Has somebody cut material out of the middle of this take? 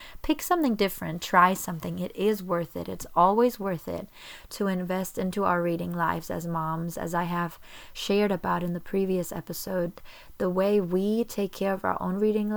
no; 0 cuts

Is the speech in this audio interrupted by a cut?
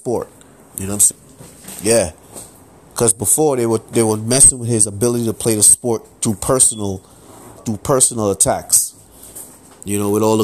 yes; 2 cuts; at 1.1 s, 7.6 s

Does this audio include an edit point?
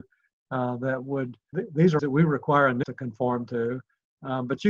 yes; 3 cuts; at 1.5 s, 2.0 s, 2.8 s

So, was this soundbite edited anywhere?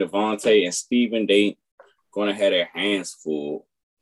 no; 0 cuts

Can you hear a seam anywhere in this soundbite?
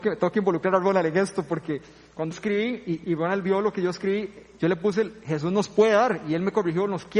yes; 2 cuts; at 2.3 s, 3.0 s

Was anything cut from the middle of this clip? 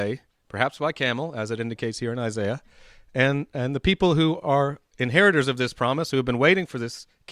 no; 0 cuts

